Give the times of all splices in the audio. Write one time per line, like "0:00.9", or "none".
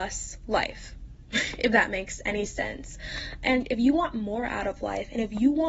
none